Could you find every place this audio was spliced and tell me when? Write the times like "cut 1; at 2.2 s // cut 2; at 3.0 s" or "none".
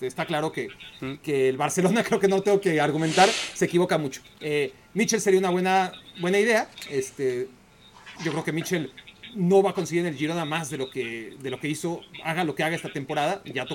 cut 1; at 8.2 s